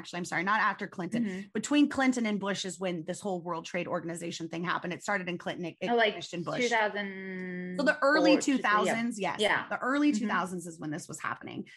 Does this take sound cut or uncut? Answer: uncut